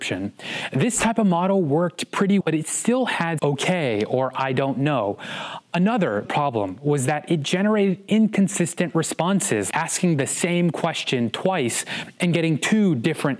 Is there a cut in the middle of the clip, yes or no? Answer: yes